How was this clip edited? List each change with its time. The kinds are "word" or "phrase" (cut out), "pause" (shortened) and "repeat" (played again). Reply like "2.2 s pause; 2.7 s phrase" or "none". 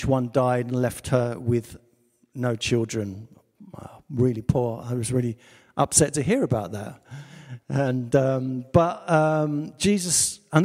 none

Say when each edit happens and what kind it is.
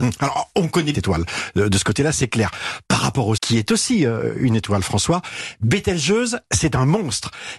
0.9 s phrase; 3.4 s word

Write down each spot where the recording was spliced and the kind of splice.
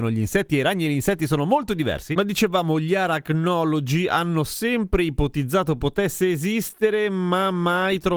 none

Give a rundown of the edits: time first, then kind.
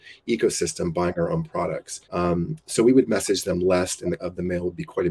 2.0 s pause; 4.2 s word

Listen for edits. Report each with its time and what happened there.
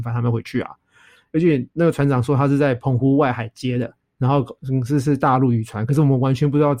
1.7 s pause; 4.0 s pause

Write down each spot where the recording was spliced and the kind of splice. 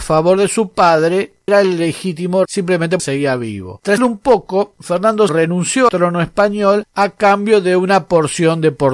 1.5 s word; 2.5 s word; 3.0 s word; 4.0 s word; 5.3 s word; 5.9 s word

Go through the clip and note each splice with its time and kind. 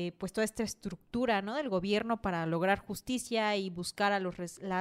none

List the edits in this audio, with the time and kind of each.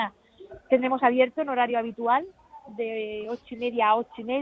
none

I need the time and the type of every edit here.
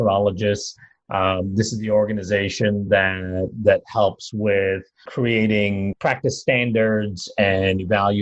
none

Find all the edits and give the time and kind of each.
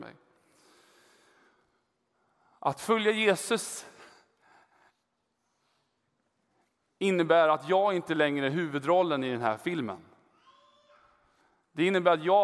none

